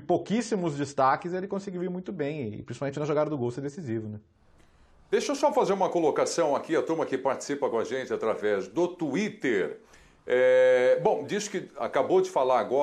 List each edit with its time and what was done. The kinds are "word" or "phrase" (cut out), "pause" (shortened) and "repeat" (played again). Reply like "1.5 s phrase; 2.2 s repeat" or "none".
none